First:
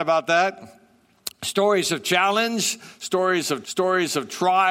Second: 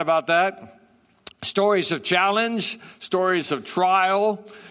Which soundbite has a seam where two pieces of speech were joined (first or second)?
first